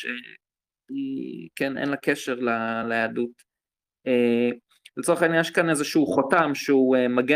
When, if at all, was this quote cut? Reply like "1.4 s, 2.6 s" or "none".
none